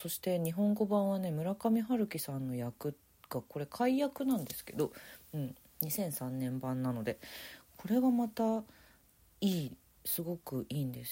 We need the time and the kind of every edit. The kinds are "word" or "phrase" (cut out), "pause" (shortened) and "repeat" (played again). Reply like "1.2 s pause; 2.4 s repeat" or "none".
none